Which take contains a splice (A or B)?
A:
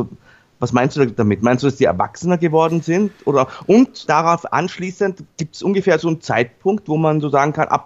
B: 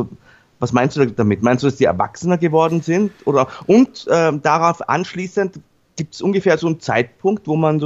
A